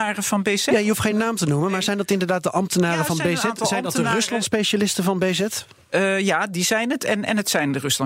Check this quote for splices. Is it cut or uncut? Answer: uncut